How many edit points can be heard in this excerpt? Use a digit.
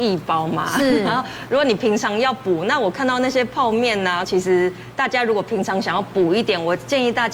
1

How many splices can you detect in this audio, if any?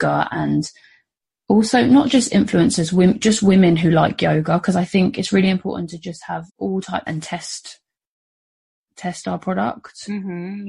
2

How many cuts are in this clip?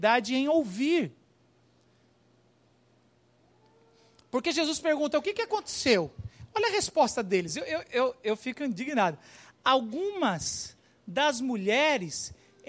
0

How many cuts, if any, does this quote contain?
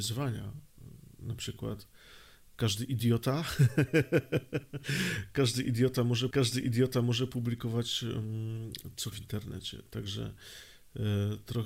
2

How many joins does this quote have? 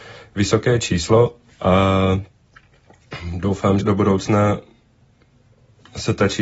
2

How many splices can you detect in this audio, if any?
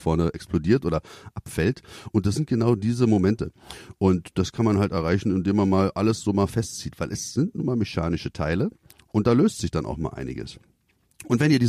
0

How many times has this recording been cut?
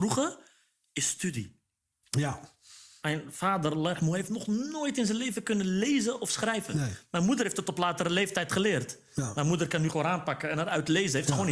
1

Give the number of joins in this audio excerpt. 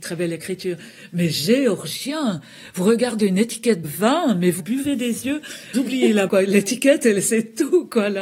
4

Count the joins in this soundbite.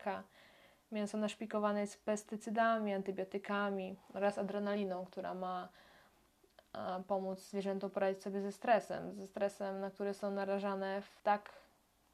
1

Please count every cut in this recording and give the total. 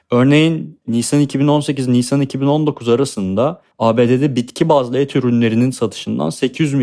1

